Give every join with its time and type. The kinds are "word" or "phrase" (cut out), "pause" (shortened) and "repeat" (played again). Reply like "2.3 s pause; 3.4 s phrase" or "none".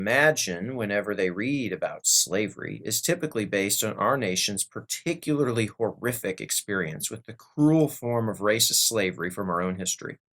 none